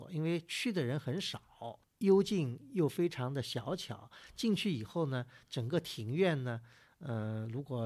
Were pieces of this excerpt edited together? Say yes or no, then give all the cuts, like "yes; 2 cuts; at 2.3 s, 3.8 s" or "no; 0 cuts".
yes; 1 cut; at 1.9 s